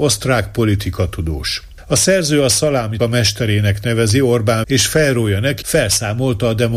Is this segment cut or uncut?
cut